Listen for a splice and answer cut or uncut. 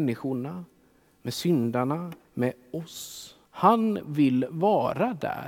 cut